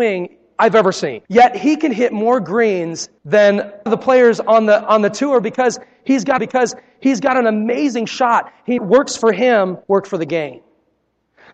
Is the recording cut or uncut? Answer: cut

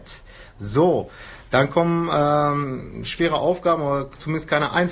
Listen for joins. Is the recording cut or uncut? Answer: uncut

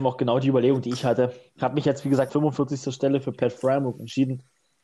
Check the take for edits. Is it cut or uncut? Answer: cut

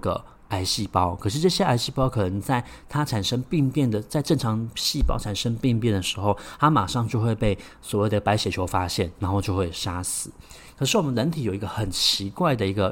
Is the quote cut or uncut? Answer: uncut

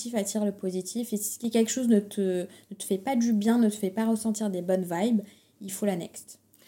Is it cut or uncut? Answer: uncut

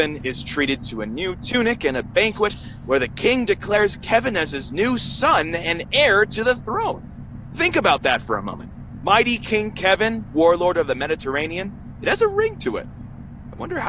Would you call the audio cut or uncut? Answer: uncut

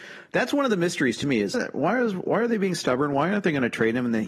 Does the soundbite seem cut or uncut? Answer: cut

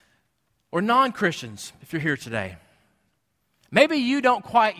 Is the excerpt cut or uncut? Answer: uncut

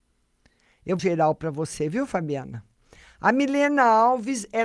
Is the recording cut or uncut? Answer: cut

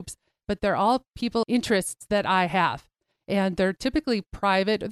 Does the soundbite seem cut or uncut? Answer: cut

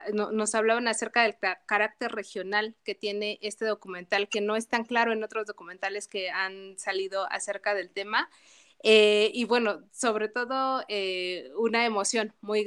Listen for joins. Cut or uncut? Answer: uncut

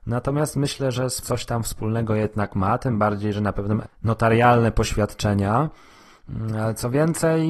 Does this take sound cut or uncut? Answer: cut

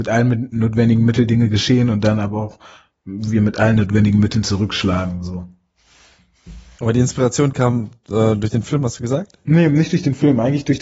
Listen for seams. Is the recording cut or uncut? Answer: uncut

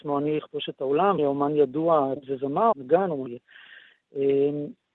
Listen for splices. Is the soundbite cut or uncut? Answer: cut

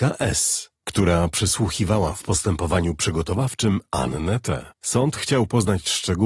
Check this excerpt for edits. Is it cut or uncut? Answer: cut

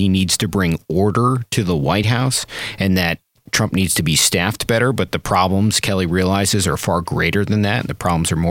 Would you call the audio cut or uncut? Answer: uncut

